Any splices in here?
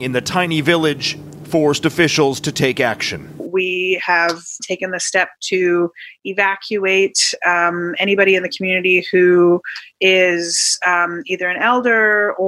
yes; 1 cut; at 4.6 s

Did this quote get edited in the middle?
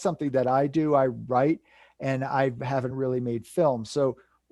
no; 0 cuts

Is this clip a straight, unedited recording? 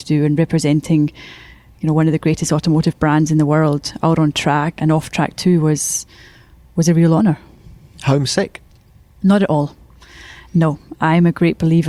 no; 1 cut; at 4.8 s

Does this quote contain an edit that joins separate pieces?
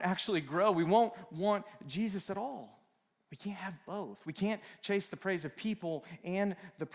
yes; 1 cut; at 3.1 s

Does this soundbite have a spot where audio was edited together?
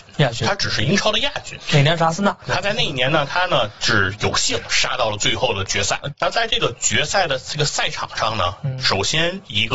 no; 0 cuts

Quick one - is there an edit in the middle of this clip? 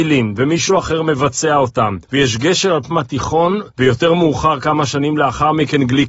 yes; 3 cuts; at 2.0 s, 2.9 s, 3.7 s

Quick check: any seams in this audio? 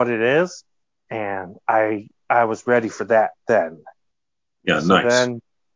no; 0 cuts

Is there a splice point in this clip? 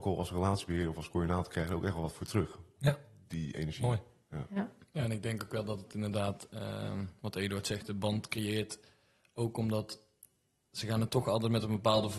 no; 0 cuts

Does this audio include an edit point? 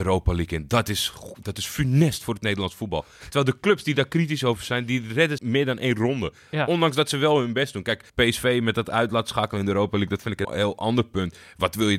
yes; 3 cuts; at 5.4 s, 8.1 s, 10.4 s

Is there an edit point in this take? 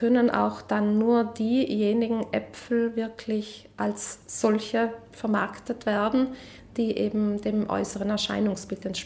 no; 0 cuts

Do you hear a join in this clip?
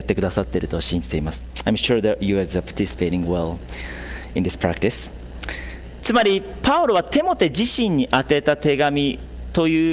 no; 0 cuts

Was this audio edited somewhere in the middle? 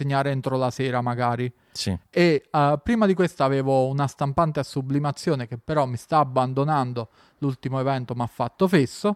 no; 0 cuts

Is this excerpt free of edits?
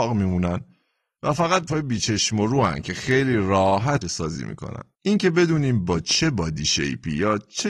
no; 3 cuts; at 1.7 s, 4.0 s, 4.9 s

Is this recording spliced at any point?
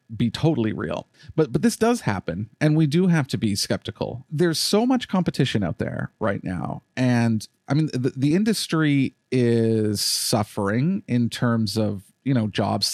no; 0 cuts

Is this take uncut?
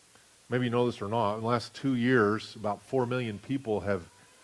yes; 0 cuts

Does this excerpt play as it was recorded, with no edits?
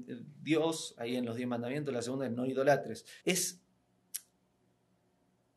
no; 1 cut; at 3.2 s

